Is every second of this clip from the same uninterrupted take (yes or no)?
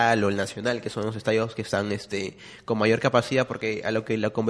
yes